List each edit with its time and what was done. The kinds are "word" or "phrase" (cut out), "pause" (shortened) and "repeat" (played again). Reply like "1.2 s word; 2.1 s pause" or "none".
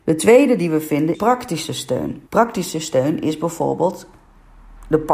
1.1 s word; 2.3 s pause